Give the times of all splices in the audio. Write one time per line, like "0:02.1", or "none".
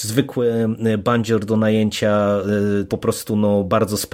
0:02.9